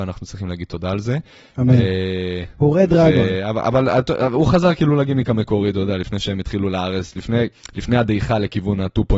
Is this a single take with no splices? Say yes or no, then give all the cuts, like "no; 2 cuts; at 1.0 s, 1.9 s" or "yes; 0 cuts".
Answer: yes; 0 cuts